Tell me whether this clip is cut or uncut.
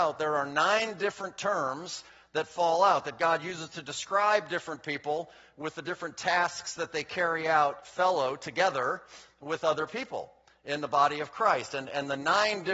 uncut